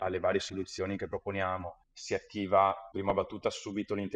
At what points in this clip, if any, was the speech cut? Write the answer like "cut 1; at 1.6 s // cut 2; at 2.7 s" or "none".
cut 1; at 1.8 s // cut 2; at 2.9 s

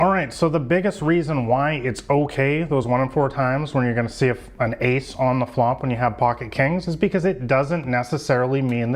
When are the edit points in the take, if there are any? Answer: none

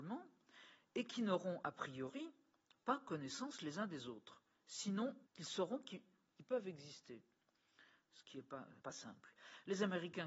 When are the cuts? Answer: cut 1; at 5.3 s // cut 2; at 8.8 s

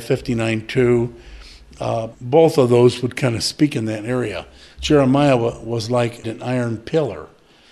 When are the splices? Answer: cut 1; at 2.1 s // cut 2; at 6.2 s

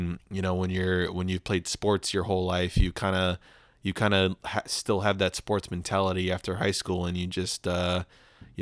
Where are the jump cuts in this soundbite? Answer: none

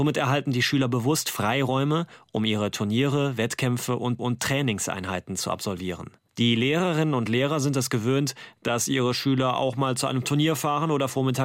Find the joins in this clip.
cut 1; at 4.2 s // cut 2; at 6.3 s

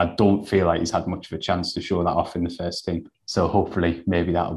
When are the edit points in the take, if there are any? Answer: cut 1; at 3.1 s

